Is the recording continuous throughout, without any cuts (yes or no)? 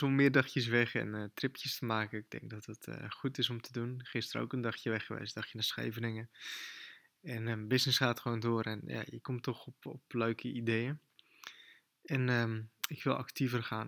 yes